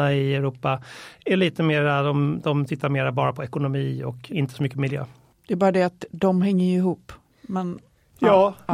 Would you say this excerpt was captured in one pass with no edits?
no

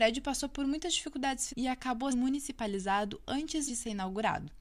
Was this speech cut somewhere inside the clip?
yes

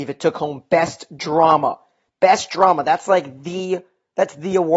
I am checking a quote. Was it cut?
no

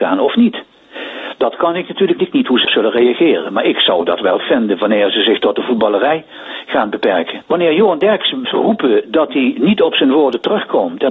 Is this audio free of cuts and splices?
no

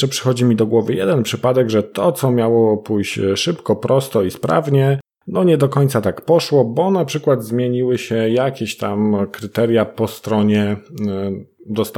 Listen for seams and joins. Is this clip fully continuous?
yes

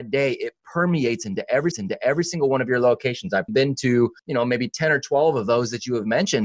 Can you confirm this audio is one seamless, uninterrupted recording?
no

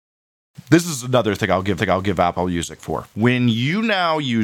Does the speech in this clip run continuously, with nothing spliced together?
no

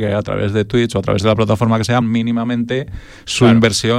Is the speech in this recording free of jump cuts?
no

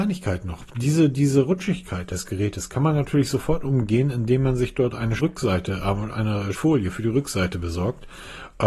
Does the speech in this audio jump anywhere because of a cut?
yes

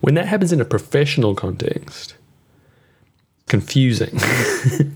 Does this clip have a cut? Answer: yes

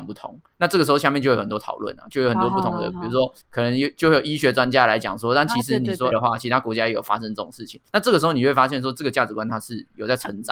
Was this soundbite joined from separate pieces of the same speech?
yes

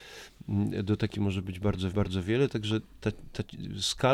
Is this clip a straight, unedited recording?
no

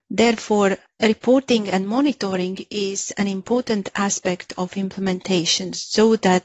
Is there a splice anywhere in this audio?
no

